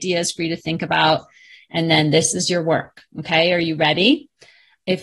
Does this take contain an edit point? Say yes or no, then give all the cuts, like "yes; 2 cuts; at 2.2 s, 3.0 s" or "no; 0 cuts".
no; 0 cuts